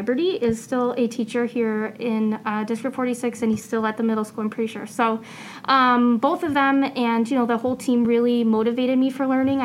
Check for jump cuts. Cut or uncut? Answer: uncut